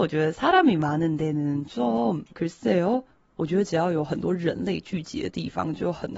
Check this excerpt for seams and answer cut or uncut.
uncut